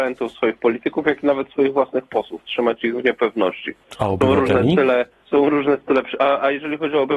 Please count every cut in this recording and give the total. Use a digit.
1